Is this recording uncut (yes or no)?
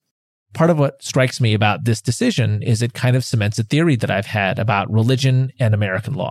yes